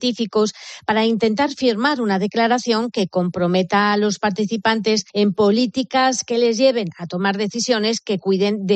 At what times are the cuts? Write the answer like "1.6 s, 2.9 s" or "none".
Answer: 5.1 s

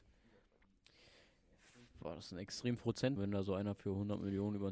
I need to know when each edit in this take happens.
2.8 s, 3.2 s

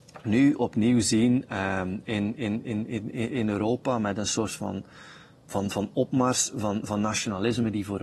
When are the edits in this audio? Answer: none

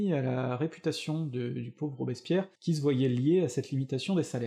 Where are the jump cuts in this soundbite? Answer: 2.5 s

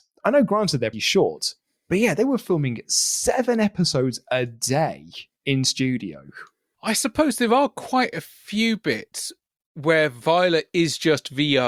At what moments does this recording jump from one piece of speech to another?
0.9 s

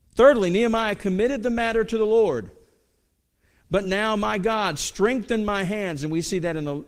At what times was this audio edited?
none

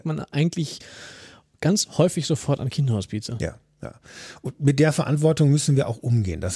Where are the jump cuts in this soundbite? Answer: none

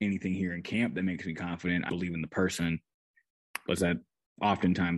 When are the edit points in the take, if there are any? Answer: 1.9 s, 3.8 s

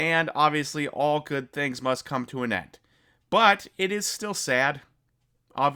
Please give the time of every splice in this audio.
none

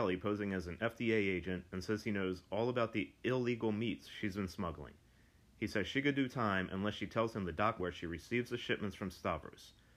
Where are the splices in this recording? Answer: 7.8 s

